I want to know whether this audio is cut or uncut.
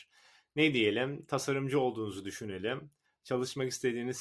uncut